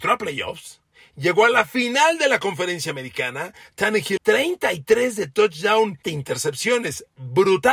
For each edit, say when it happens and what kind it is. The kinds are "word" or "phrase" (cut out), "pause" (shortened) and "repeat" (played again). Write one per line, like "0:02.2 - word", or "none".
0:04.2 - word
0:06.0 - word